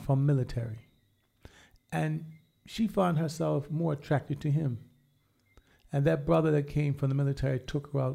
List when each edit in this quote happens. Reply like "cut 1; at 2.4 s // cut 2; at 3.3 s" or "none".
none